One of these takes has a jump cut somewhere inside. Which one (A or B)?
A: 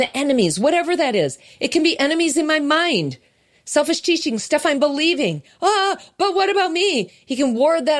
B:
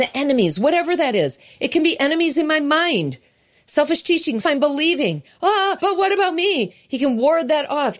B